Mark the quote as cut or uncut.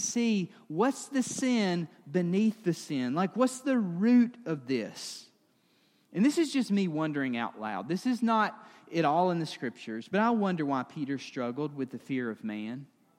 uncut